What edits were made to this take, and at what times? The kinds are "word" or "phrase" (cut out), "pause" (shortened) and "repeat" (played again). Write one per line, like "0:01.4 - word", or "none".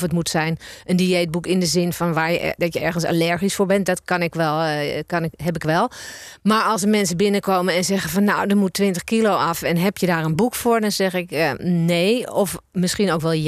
none